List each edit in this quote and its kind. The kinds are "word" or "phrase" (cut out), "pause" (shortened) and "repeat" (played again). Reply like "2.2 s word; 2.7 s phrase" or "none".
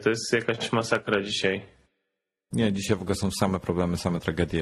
none